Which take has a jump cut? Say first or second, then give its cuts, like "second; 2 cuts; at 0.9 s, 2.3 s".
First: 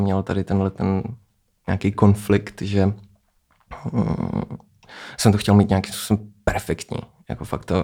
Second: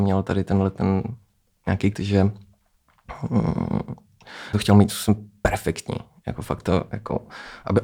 second; 3 cuts; at 1.9 s, 4.5 s, 4.9 s